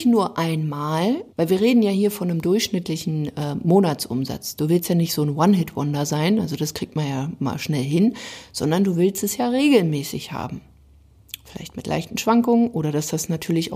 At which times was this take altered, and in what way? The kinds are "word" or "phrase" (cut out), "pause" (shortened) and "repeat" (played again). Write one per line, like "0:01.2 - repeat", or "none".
0:01.3 - pause